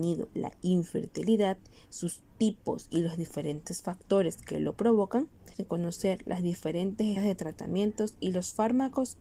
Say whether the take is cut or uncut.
cut